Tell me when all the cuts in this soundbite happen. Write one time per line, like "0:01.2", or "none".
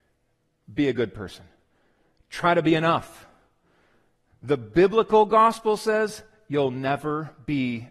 none